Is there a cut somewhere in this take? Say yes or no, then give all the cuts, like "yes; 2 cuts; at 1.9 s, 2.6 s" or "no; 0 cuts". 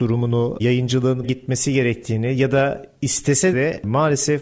yes; 2 cuts; at 1.2 s, 3.5 s